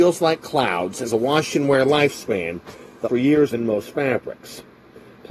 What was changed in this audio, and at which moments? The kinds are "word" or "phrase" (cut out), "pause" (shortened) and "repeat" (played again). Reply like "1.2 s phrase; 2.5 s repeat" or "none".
1.1 s word; 3.0 s word; 3.5 s word